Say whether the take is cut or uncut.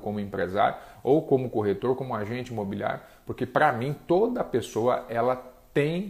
uncut